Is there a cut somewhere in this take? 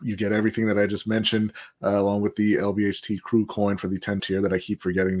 yes; 1 cut; at 4.2 s

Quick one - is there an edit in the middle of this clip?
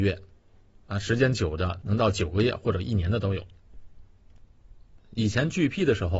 no; 0 cuts

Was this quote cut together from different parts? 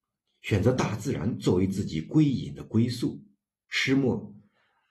no; 0 cuts

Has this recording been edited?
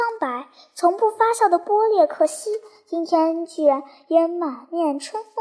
no; 0 cuts

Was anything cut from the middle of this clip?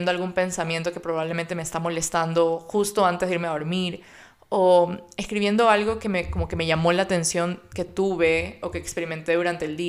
no; 0 cuts

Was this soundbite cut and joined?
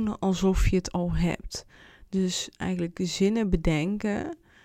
no; 0 cuts

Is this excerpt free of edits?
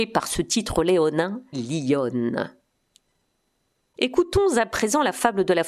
no; 1 cut; at 1.5 s

